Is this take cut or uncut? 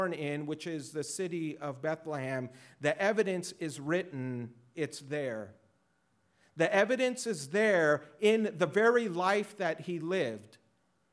uncut